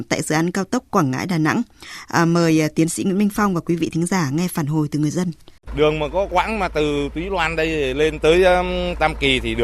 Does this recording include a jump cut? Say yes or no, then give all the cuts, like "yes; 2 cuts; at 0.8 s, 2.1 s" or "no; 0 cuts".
yes; 1 cut; at 5.6 s